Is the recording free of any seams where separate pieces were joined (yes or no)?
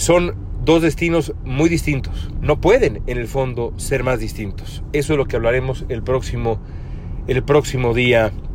yes